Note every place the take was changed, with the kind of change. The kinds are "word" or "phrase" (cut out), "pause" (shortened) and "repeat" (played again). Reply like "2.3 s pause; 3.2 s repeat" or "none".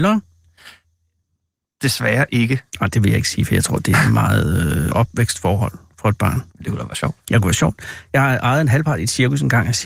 2.7 s pause; 4.9 s phrase; 6.5 s pause